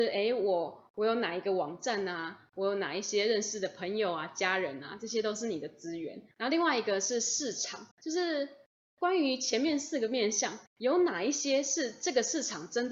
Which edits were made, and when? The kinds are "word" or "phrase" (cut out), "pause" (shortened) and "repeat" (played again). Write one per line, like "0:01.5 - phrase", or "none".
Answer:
0:06.3 - pause
0:07.9 - pause
0:10.7 - pause